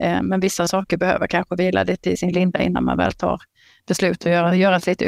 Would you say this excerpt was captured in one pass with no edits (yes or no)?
yes